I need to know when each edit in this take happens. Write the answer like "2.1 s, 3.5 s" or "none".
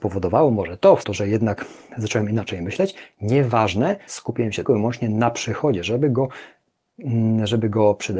1.0 s, 4.1 s, 4.6 s